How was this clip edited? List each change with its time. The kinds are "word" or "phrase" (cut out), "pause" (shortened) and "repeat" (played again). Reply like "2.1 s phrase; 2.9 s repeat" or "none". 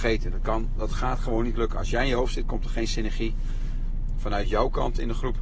none